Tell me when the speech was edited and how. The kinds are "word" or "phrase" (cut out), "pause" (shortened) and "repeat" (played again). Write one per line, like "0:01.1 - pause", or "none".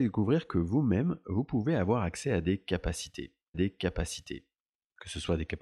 0:03.5 - repeat